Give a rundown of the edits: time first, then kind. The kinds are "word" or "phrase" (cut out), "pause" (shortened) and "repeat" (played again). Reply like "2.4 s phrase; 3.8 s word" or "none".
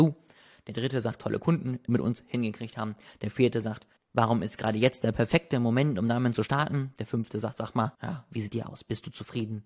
1.2 s phrase; 1.9 s word; 4.0 s pause; 7.9 s pause; 8.5 s phrase